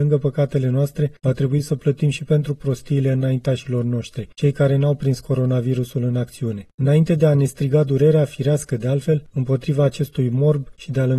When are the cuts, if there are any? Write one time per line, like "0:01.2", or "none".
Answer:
0:01.2
0:04.3